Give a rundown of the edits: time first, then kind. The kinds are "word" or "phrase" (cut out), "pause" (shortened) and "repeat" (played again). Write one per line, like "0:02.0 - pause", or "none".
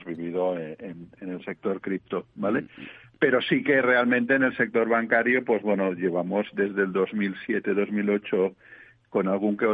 none